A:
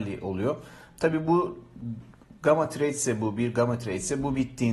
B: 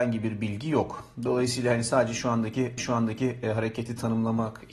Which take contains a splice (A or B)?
B